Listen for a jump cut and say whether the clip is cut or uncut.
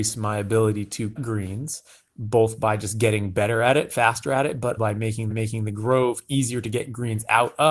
cut